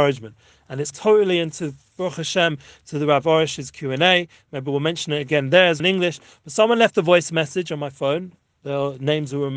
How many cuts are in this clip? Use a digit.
2